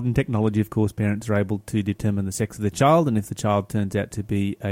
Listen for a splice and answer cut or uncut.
uncut